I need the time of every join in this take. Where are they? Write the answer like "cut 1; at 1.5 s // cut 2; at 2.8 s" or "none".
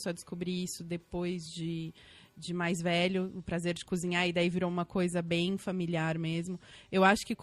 none